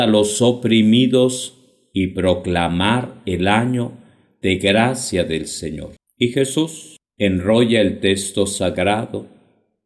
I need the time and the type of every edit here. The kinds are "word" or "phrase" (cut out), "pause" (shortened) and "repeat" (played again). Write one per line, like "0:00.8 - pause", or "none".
none